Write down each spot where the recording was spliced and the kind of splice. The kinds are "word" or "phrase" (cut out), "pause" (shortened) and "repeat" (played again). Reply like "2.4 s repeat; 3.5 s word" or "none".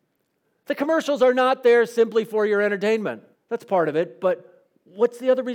3.4 s pause